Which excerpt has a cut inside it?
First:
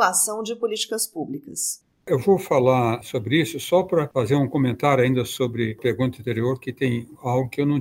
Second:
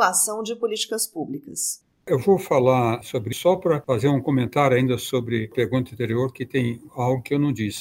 second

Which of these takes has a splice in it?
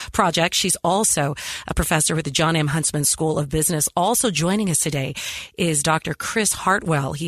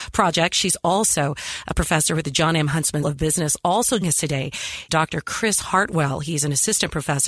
second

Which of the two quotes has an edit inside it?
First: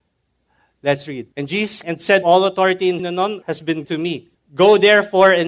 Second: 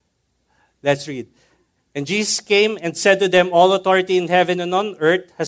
first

